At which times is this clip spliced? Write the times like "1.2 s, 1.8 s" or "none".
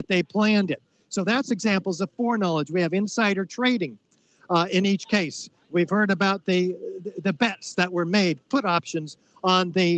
none